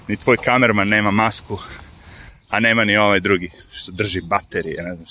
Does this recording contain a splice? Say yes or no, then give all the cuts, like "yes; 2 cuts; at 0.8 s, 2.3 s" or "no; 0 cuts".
no; 0 cuts